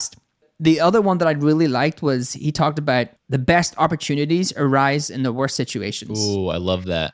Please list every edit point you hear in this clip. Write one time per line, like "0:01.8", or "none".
0:03.2